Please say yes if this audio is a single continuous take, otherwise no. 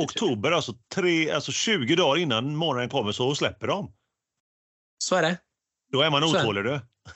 yes